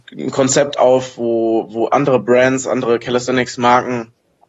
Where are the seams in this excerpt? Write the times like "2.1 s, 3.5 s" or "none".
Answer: none